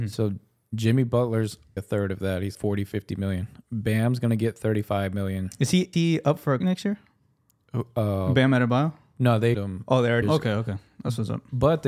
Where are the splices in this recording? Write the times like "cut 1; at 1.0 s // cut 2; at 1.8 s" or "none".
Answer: cut 1; at 1.8 s // cut 2; at 2.5 s // cut 3; at 5.9 s // cut 4; at 6.6 s // cut 5; at 9.5 s // cut 6; at 10.2 s